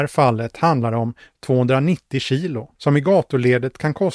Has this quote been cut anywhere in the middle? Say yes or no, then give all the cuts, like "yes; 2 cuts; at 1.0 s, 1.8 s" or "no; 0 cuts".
yes; 1 cut; at 2.8 s